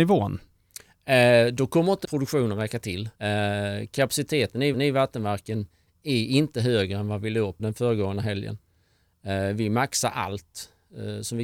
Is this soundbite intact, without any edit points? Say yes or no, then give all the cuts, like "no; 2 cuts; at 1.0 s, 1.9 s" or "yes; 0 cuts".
no; 4 cuts; at 2.0 s, 3.2 s, 4.7 s, 7.6 s